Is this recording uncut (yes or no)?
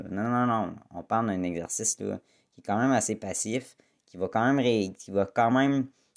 yes